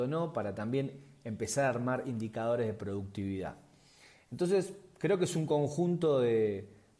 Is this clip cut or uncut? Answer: uncut